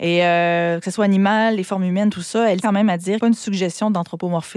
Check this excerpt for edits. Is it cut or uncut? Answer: cut